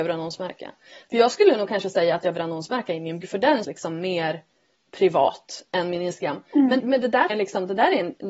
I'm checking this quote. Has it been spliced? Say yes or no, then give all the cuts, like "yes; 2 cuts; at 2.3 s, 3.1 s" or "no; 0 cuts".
yes; 6 cuts; at 2.3 s, 3.2 s, 3.6 s, 4.7 s, 6.8 s, 7.3 s